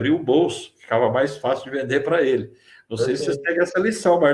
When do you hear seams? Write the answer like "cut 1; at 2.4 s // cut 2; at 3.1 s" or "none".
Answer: none

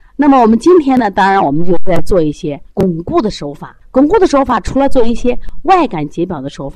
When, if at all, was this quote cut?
cut 1; at 2.7 s // cut 2; at 3.8 s

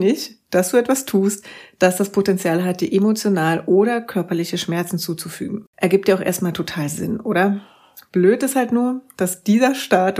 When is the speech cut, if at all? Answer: cut 1; at 5.7 s

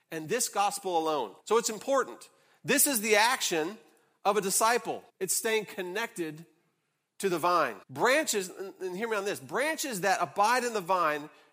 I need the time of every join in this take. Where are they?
cut 1; at 1.4 s // cut 2; at 5.1 s // cut 3; at 7.8 s

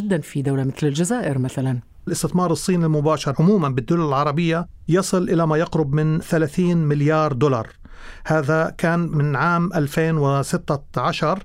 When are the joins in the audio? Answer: cut 1; at 2.1 s

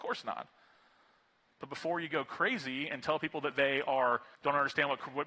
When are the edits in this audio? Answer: cut 1; at 4.3 s

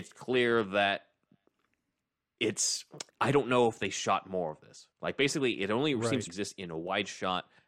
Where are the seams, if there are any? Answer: cut 1; at 3.1 s // cut 2; at 4.9 s // cut 3; at 6.3 s

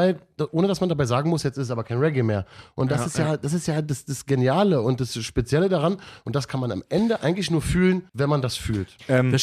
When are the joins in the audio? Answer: cut 1; at 8.1 s

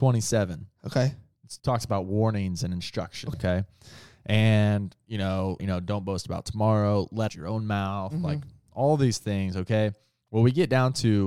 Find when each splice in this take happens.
cut 1; at 1.6 s // cut 2; at 3.3 s // cut 3; at 5.6 s // cut 4; at 7.3 s

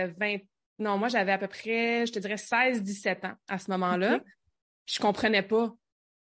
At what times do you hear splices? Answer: none

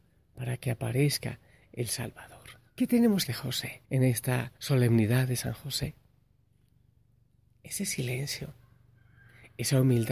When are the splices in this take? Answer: cut 1; at 2.7 s // cut 2; at 3.3 s // cut 3; at 3.8 s // cut 4; at 4.6 s

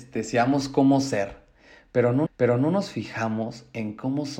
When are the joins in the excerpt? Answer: cut 1; at 2.3 s

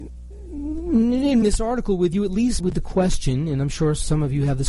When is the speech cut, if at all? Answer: cut 1; at 1.4 s // cut 2; at 2.6 s

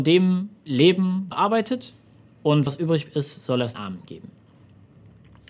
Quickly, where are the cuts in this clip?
cut 1; at 1.3 s // cut 2; at 2.7 s // cut 3; at 3.7 s

